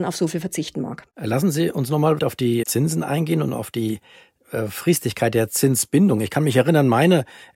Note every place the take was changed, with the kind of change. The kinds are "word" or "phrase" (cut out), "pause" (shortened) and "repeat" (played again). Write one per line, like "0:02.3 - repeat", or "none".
0:01.1 - pause
0:02.2 - word
0:02.6 - word